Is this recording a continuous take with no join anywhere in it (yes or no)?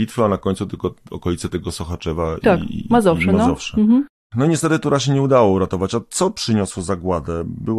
yes